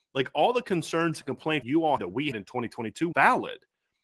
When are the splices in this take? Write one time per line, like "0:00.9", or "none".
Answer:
0:01.6
0:02.0
0:02.3
0:03.1